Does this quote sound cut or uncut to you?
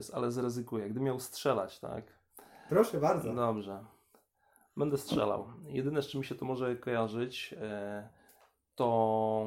uncut